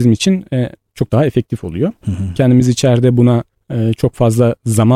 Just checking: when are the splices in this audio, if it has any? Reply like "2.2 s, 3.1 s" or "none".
none